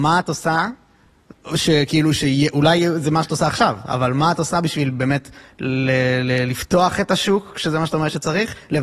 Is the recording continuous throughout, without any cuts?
yes; 0 cuts

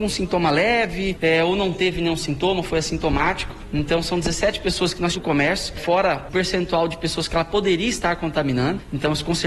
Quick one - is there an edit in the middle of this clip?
yes; 2 cuts; at 5.1 s, 6.3 s

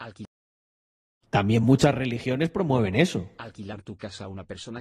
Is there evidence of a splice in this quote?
no; 0 cuts

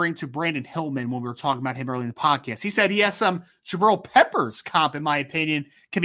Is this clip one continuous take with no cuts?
yes; 0 cuts

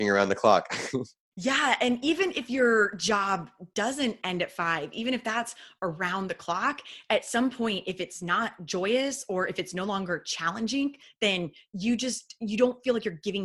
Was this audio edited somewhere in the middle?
yes; 1 cut; at 1.3 s

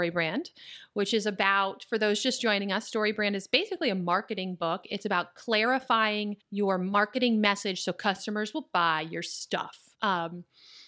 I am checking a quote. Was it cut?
yes; 2 cuts; at 6.4 s, 9.9 s

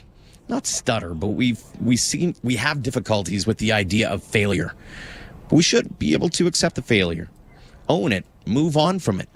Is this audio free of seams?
yes; 0 cuts

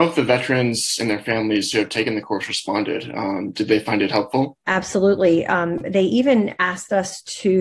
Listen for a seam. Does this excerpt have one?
yes; 1 cut; at 4.6 s

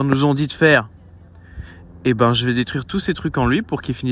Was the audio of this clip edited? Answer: no; 0 cuts

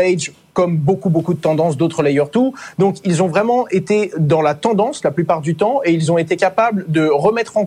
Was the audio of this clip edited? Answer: no; 0 cuts

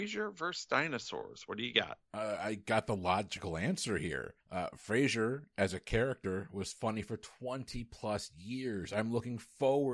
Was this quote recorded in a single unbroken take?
no; 2 cuts; at 2.1 s, 4.4 s

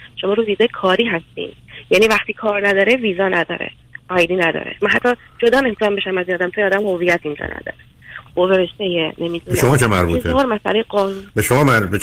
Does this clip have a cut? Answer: no; 0 cuts

